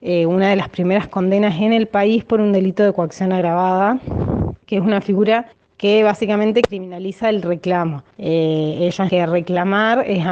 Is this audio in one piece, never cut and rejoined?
no; 4 cuts; at 4.6 s, 5.5 s, 8.1 s, 9.1 s

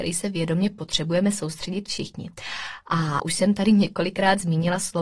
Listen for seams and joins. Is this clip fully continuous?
no; 1 cut; at 3.2 s

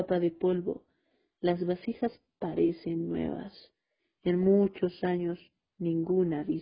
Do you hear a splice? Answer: no; 0 cuts

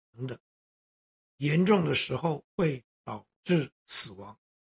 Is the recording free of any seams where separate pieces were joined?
no; 1 cut; at 2.5 s

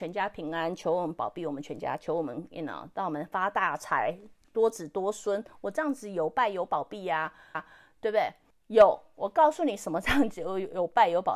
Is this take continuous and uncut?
no; 2 cuts; at 7.5 s, 8.5 s

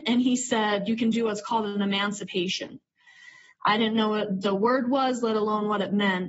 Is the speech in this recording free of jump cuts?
yes; 0 cuts

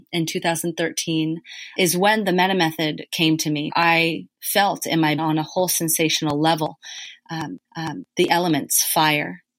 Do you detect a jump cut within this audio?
yes; 4 cuts; at 1.8 s, 3.7 s, 5.2 s, 7.6 s

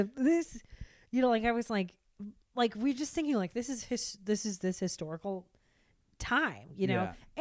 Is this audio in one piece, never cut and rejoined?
yes; 0 cuts

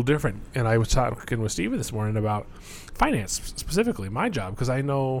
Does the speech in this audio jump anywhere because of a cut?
no; 0 cuts

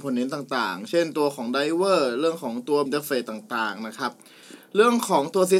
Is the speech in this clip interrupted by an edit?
yes; 1 cut; at 2.9 s

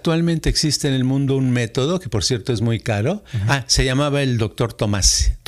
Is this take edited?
no; 0 cuts

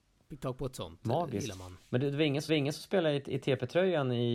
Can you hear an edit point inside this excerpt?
yes; 1 cut; at 2.5 s

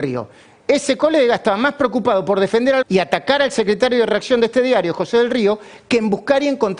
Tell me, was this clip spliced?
yes; 1 cut; at 2.8 s

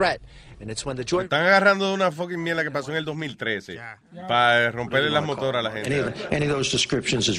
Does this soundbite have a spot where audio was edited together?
yes; 1 cut; at 4.0 s

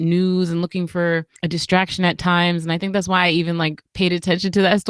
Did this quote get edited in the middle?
yes; 2 cuts; at 1.4 s, 3.9 s

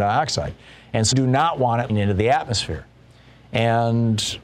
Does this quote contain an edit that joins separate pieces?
yes; 2 cuts; at 1.1 s, 1.9 s

